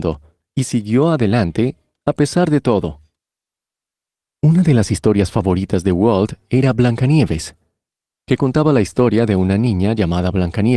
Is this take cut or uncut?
uncut